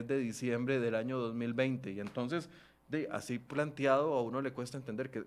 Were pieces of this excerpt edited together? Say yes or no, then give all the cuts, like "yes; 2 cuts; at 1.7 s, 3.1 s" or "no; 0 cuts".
no; 0 cuts